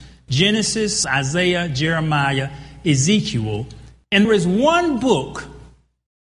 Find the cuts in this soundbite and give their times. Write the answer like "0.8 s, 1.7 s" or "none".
1.0 s, 4.2 s